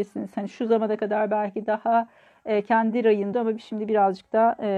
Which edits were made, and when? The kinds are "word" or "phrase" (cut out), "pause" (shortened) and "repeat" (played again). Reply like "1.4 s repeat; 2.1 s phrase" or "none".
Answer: 3.3 s word